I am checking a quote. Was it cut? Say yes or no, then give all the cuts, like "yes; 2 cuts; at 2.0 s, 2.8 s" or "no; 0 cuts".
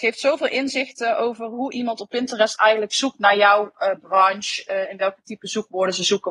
no; 0 cuts